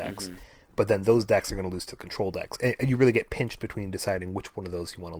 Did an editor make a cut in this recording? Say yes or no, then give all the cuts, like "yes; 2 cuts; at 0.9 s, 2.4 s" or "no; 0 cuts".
no; 0 cuts